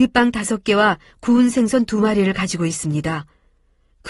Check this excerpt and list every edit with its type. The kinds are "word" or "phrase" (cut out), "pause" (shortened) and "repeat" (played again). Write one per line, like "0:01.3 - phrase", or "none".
none